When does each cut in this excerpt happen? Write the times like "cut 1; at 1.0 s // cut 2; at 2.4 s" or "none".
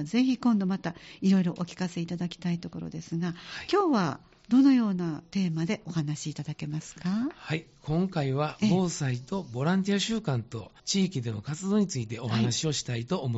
cut 1; at 10.8 s